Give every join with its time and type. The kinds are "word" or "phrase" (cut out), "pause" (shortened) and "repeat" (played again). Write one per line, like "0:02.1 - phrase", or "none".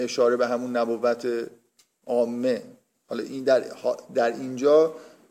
none